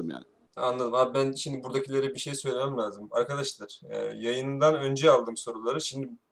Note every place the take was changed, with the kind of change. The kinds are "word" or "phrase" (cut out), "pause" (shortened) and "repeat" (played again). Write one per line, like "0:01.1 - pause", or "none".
none